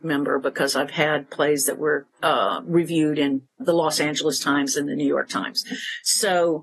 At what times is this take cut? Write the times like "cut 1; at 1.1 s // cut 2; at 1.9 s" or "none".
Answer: cut 1; at 2.1 s // cut 2; at 3.6 s